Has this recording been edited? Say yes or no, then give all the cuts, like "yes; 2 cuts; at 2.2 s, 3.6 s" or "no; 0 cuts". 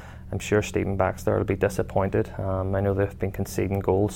no; 0 cuts